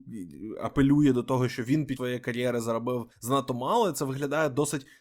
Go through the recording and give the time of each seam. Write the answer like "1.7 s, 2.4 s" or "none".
2.0 s, 3.1 s